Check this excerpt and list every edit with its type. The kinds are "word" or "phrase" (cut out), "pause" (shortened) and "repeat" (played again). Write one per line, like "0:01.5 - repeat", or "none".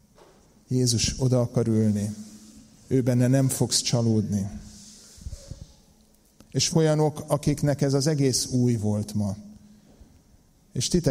0:06.7 - word